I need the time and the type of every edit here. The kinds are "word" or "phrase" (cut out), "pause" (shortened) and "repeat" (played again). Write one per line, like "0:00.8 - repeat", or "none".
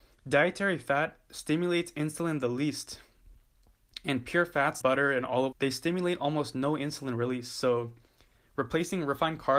0:04.8 - word
0:05.5 - word